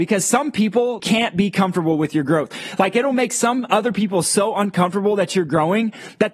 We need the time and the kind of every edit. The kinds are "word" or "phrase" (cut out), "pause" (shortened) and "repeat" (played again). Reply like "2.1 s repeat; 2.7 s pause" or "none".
1.0 s word